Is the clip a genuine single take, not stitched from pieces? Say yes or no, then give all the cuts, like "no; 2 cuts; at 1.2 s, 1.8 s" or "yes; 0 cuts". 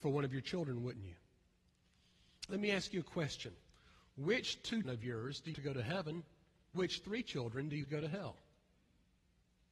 no; 5 cuts; at 2.5 s, 4.8 s, 5.5 s, 6.7 s, 7.8 s